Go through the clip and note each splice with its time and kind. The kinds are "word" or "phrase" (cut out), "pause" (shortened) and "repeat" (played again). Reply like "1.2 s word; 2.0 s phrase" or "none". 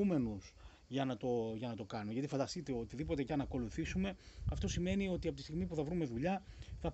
3.3 s word